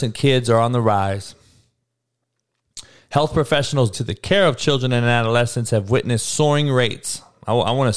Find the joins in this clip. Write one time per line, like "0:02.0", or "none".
0:03.9